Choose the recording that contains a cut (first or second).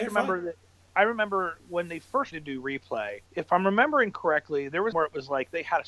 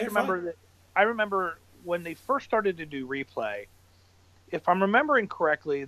first